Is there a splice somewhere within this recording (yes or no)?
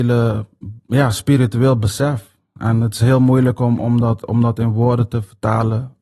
no